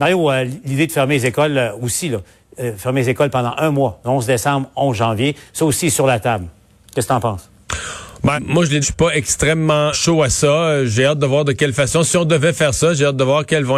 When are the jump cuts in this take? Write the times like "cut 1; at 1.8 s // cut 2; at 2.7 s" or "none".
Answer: cut 1; at 8.4 s // cut 2; at 8.8 s // cut 3; at 9.9 s